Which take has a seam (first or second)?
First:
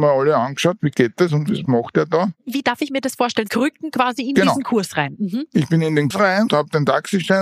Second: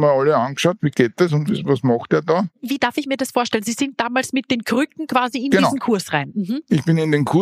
first